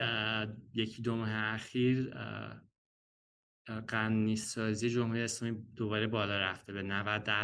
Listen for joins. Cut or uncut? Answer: uncut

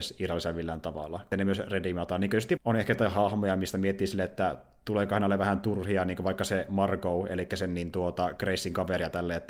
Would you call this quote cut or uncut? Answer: cut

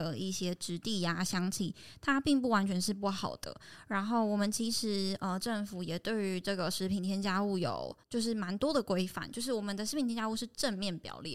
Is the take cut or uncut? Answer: cut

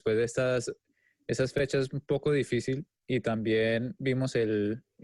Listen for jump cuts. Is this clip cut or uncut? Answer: uncut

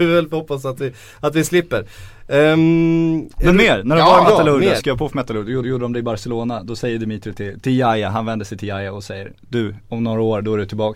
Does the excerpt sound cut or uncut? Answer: cut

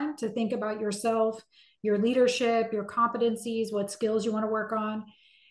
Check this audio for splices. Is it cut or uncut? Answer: uncut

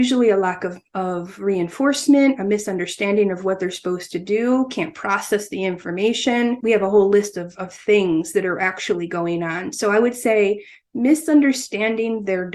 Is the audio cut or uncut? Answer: uncut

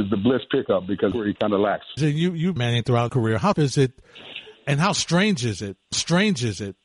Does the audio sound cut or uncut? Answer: cut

